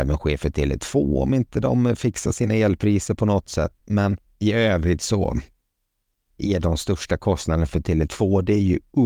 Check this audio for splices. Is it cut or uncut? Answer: uncut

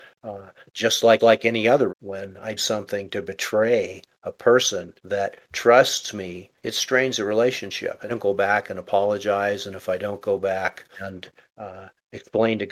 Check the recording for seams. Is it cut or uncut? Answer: cut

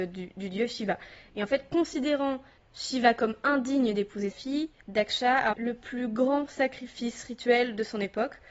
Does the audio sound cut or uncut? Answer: cut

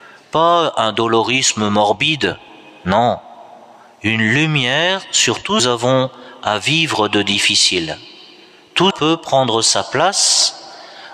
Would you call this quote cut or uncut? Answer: cut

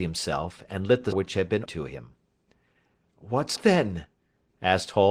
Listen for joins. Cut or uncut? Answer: cut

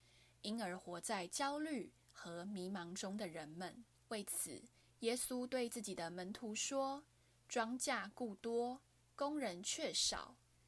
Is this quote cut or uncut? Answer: cut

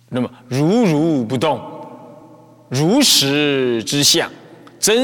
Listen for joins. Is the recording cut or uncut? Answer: uncut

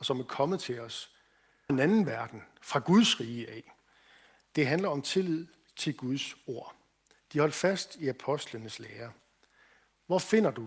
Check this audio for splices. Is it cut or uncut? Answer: cut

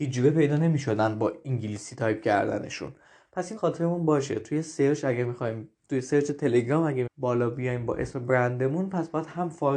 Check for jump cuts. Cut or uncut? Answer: cut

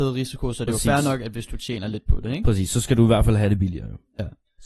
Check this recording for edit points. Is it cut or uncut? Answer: uncut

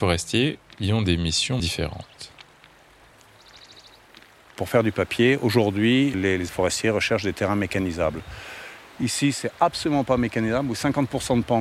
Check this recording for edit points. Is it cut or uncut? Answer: cut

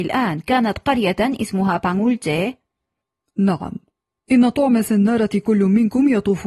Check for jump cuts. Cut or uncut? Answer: uncut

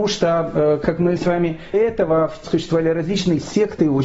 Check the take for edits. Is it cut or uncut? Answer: cut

